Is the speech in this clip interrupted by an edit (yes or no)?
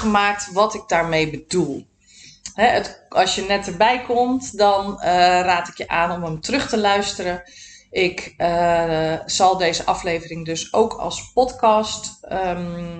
no